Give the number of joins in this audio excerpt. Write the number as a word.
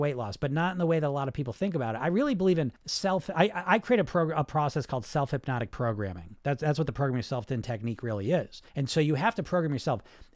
two